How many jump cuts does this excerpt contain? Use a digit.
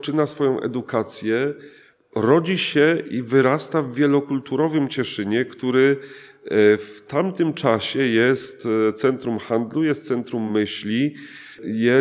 0